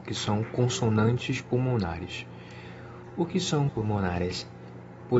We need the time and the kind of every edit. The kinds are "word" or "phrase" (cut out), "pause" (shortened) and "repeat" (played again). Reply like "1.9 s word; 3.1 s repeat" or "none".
3.7 s word